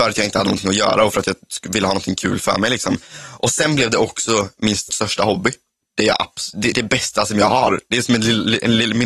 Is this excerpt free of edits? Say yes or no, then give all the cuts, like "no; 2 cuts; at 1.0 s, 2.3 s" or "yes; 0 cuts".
no; 2 cuts; at 4.9 s, 6.7 s